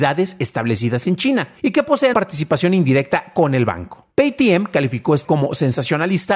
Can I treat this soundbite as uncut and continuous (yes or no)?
no